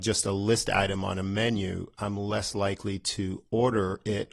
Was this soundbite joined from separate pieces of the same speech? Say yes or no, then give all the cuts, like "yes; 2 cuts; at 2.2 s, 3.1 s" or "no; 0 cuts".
no; 0 cuts